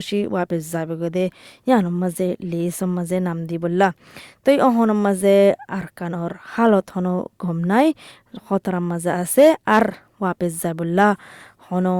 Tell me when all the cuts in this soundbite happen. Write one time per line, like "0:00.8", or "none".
none